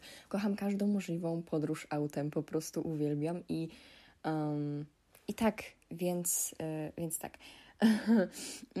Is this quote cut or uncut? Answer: uncut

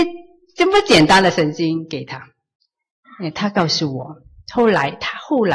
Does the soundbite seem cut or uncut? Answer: uncut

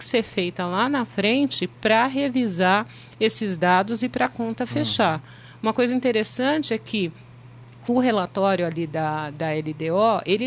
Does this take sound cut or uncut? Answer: uncut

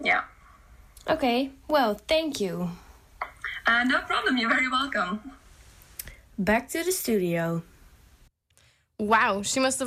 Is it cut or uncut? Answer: uncut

